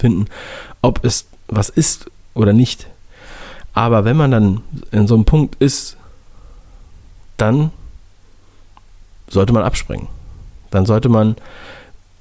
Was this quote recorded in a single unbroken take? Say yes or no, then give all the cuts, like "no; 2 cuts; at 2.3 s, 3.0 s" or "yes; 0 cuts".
yes; 0 cuts